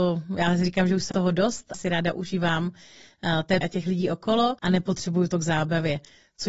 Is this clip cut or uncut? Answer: cut